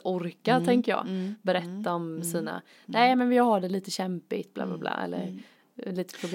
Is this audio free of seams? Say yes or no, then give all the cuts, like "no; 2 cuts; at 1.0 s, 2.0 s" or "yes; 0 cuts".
yes; 0 cuts